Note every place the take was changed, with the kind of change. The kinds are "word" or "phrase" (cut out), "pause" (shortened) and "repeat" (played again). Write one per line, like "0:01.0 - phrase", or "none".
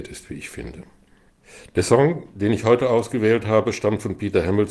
none

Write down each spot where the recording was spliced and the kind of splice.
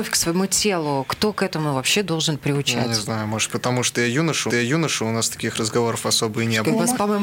0:04.5 - repeat

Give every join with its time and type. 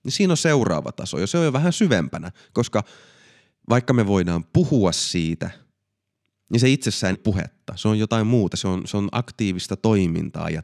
0:07.1 - word

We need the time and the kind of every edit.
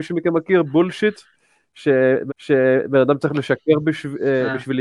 0:02.3 - repeat

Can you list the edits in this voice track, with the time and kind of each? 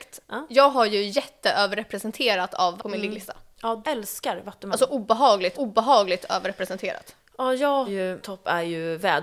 0:02.8 - word
0:03.8 - word
0:05.5 - repeat
0:07.9 - word
0:08.2 - word

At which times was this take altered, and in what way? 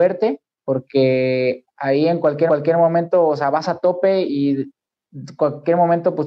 0:02.5 - repeat

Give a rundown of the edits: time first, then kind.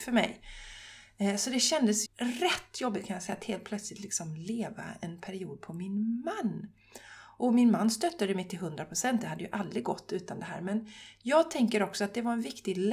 0:02.1 - word

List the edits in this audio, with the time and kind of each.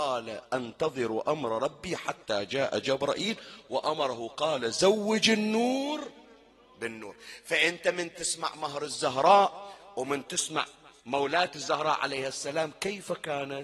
0:11.0 - pause

